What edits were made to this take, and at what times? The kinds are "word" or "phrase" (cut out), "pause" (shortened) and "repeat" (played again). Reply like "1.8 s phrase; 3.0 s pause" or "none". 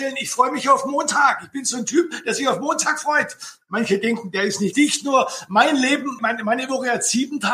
4.7 s word; 6.2 s word